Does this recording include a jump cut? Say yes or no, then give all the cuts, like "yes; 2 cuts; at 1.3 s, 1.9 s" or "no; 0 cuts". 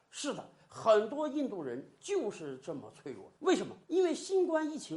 yes; 1 cut; at 3.8 s